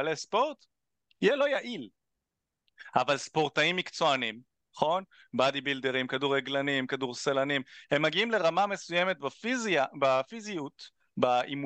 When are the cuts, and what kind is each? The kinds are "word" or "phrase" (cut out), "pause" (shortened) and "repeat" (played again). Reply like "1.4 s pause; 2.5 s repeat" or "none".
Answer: 4.6 s pause